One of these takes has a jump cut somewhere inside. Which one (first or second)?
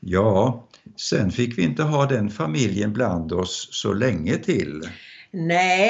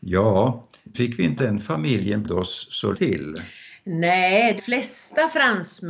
second